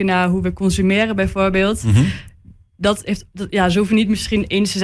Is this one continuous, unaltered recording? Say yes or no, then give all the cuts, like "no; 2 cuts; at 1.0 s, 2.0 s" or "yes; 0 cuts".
yes; 0 cuts